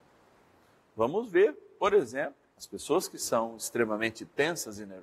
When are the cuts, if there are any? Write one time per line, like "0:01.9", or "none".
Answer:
0:02.5